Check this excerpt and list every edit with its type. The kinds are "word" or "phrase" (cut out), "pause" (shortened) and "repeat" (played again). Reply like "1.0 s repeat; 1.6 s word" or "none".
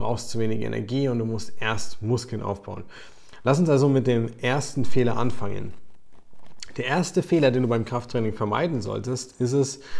none